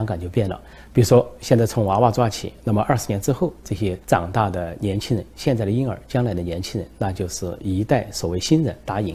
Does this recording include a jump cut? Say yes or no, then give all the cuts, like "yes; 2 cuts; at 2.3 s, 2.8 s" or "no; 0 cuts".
yes; 1 cut; at 4.0 s